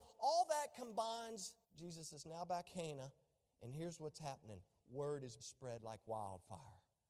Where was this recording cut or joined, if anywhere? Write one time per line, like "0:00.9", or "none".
0:01.6
0:02.6
0:05.4